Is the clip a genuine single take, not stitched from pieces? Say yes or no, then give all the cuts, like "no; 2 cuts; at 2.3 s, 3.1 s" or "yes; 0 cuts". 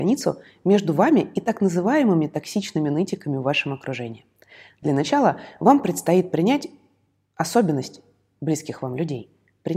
yes; 0 cuts